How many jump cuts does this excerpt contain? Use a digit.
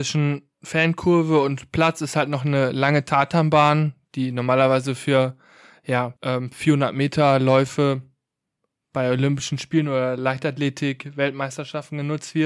1